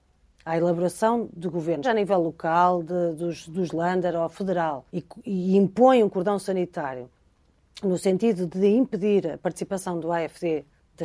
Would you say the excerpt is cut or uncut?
cut